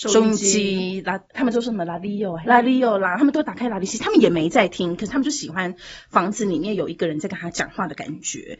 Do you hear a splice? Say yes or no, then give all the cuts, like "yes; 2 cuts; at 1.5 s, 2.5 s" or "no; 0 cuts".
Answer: yes; 2 cuts; at 1.2 s, 2.4 s